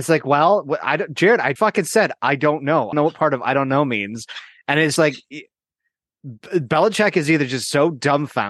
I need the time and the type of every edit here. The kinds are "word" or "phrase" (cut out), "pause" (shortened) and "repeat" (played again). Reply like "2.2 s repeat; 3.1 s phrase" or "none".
1.6 s word; 2.9 s word; 5.0 s word